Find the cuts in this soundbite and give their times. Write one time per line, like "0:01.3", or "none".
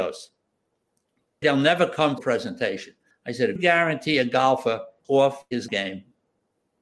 0:01.4
0:02.2
0:03.1
0:03.6
0:05.0
0:05.7